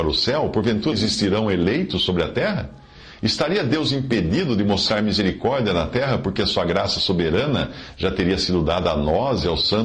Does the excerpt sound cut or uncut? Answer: cut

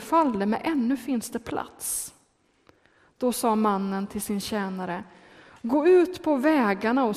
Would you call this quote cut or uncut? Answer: uncut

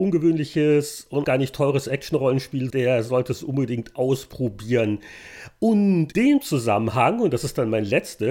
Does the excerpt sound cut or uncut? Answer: cut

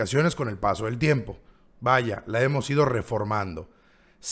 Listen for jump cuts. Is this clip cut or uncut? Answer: uncut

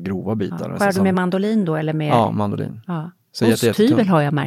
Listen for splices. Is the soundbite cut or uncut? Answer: uncut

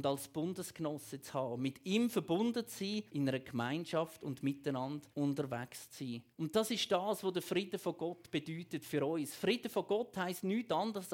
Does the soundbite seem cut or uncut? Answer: cut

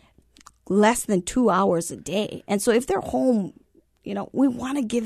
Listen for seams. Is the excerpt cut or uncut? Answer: uncut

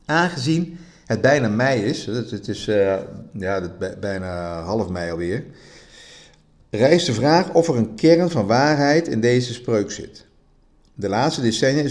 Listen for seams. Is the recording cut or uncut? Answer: uncut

